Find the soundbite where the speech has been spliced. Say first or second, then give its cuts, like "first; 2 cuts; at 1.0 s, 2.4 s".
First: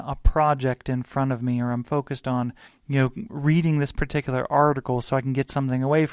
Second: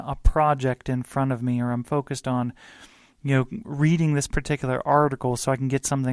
first; 1 cut; at 2.7 s